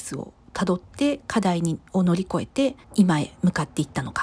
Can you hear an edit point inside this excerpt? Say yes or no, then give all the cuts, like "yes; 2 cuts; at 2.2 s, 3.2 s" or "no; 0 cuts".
yes; 2 cuts; at 1.9 s, 2.8 s